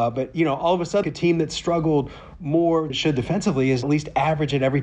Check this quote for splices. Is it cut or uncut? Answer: cut